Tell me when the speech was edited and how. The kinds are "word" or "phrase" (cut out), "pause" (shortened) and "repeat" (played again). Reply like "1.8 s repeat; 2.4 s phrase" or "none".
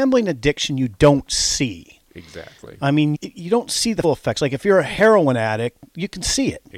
3.1 s word; 4.0 s word